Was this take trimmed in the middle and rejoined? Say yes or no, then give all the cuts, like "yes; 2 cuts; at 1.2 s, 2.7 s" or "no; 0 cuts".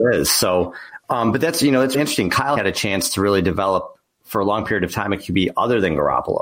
yes; 2 cuts; at 1.9 s, 2.6 s